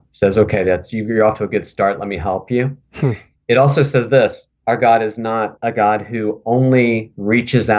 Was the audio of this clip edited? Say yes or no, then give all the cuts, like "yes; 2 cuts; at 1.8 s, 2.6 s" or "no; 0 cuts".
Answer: no; 0 cuts